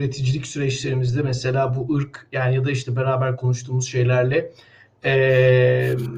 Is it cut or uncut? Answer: uncut